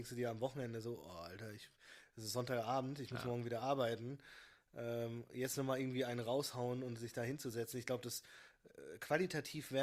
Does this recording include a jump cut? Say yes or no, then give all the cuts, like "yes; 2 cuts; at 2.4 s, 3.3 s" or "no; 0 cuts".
no; 0 cuts